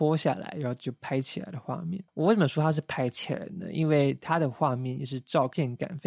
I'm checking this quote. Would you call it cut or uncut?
cut